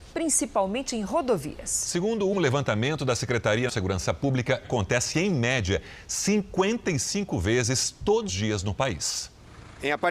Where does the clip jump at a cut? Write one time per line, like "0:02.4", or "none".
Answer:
0:02.3
0:03.7
0:04.6
0:08.3